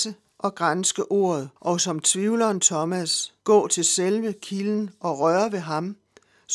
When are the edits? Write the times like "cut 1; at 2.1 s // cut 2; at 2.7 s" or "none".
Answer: cut 1; at 1.6 s // cut 2; at 3.4 s